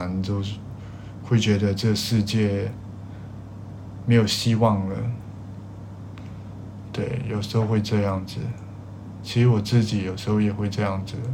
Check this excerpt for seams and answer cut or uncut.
uncut